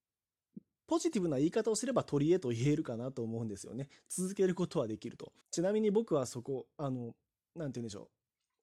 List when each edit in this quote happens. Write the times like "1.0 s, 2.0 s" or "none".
5.4 s